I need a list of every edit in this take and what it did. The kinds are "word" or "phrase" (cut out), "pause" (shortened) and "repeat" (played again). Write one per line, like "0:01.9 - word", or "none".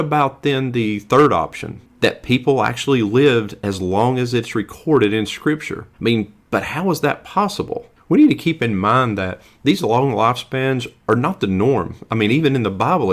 0:05.9 - pause